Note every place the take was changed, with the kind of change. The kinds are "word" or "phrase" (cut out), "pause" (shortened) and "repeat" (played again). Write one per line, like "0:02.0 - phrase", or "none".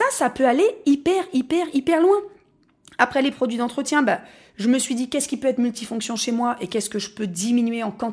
none

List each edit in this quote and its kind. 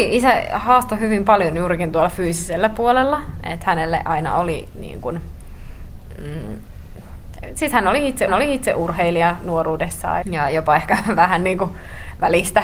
0:08.3 - repeat
0:10.2 - word

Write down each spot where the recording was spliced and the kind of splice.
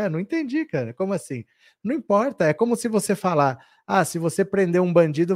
none

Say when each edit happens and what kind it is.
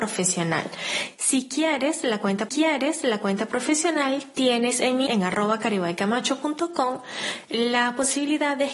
0:02.5 - repeat
0:05.1 - word

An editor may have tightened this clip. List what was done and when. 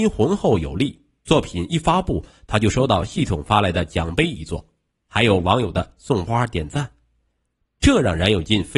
none

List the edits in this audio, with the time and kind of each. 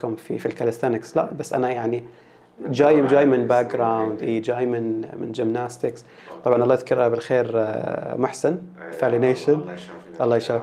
none

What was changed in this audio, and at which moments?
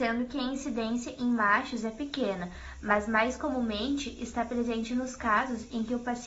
none

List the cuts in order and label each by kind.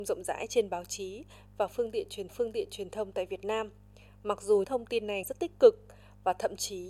0:02.3 - repeat
0:04.6 - word
0:05.2 - word

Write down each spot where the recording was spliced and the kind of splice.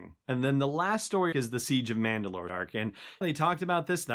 0:01.3 - word
0:02.5 - word
0:03.2 - word

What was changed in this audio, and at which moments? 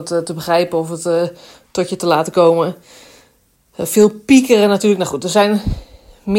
none

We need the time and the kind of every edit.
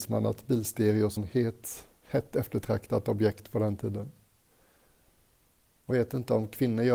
0:01.2 - word
0:02.1 - word
0:05.9 - word

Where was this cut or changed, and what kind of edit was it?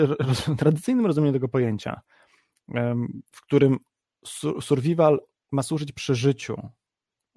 none

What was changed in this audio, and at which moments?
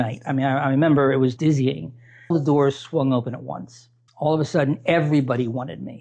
0:01.4 - word
0:02.3 - word
0:04.1 - pause

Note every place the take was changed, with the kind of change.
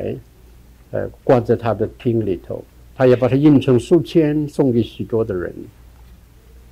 0:01.2 - pause
0:02.7 - pause

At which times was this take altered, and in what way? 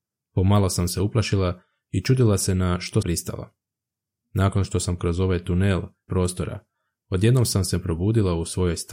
0:03.0 - word
0:05.0 - word
0:06.1 - word

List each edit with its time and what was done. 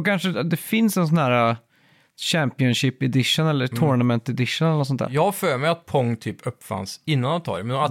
none

